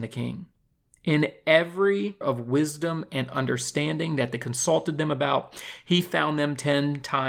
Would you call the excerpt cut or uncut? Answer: cut